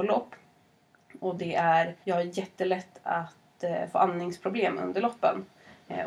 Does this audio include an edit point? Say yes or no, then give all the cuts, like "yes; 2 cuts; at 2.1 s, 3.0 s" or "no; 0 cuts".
yes; 1 cut; at 2.0 s